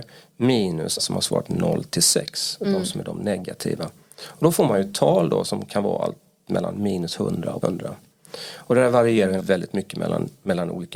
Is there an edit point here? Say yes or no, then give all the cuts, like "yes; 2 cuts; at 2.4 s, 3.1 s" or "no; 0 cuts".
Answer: yes; 3 cuts; at 1.0 s, 7.6 s, 9.4 s